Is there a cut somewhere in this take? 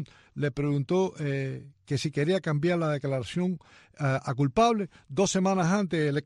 no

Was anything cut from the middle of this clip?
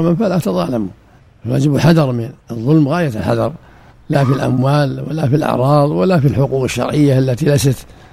yes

